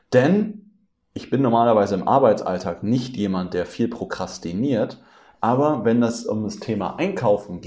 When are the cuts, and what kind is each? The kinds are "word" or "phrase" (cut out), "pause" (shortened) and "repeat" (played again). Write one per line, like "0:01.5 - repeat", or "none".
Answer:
0:00.9 - pause